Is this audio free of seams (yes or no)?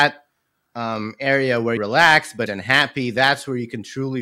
no